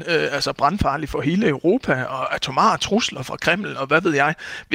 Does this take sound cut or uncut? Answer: uncut